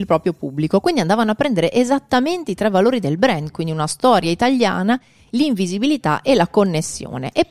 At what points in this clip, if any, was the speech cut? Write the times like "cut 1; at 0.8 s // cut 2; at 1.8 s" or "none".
none

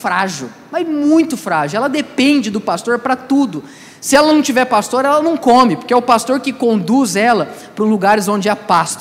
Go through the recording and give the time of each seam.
none

